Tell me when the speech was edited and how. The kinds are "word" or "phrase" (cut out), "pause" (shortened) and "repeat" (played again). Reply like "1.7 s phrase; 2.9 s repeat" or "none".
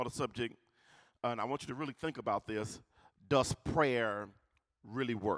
none